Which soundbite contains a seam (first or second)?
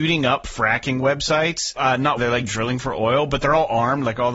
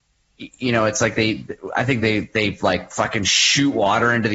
first